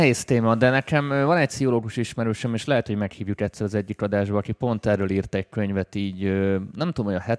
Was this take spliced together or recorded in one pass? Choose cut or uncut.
uncut